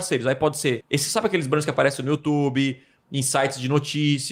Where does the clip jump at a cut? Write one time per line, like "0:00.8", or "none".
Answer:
none